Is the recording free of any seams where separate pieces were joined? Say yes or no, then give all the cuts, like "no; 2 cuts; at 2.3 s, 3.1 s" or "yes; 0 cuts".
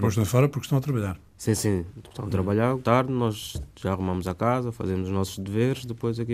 no; 1 cut; at 2.8 s